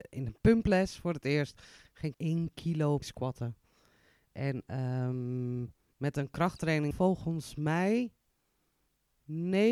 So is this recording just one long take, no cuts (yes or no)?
no